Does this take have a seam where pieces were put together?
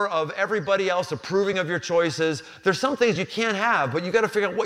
no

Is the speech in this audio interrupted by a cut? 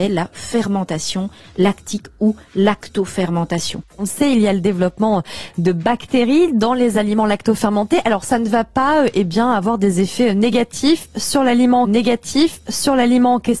yes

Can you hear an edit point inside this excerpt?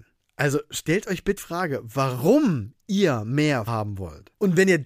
yes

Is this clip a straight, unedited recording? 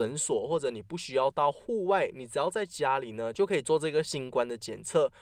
yes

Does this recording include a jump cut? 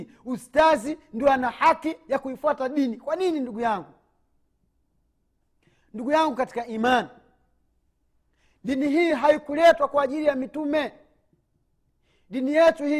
no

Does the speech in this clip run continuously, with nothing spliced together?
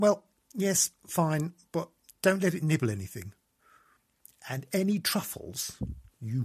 yes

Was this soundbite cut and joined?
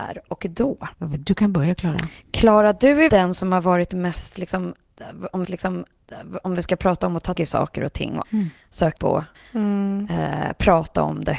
yes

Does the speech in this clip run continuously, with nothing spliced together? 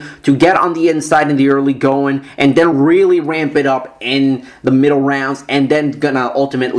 yes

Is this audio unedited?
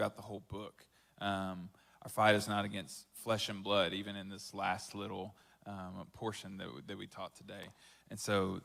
yes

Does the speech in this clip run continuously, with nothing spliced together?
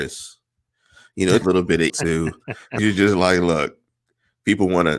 no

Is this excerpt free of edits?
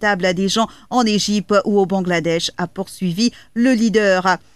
yes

